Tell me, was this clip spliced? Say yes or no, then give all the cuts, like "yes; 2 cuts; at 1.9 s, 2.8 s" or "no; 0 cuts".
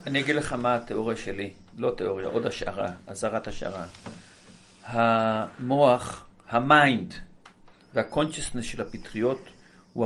no; 0 cuts